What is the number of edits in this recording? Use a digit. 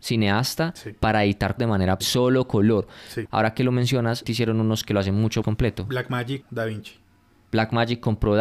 7